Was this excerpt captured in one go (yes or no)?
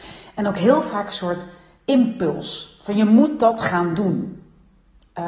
yes